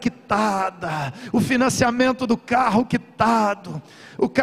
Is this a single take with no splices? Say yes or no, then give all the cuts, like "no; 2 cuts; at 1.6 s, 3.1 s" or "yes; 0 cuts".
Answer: yes; 0 cuts